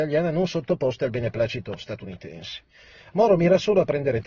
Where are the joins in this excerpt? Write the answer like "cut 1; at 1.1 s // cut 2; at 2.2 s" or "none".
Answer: none